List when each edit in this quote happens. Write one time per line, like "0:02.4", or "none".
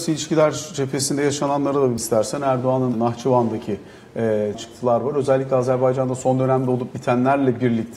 0:02.0
0:02.9
0:04.5